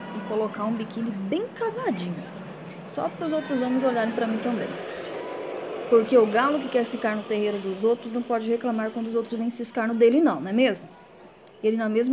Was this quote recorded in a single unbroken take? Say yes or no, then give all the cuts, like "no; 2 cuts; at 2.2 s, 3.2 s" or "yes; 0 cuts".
yes; 0 cuts